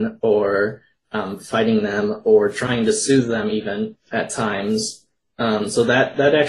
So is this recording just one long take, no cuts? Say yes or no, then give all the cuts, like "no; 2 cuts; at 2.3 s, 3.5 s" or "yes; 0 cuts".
yes; 0 cuts